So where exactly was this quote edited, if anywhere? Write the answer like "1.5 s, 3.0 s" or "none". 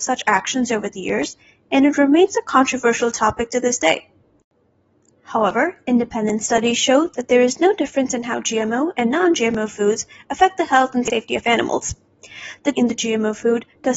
12.7 s